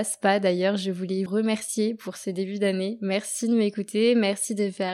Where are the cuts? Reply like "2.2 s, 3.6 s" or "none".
1.3 s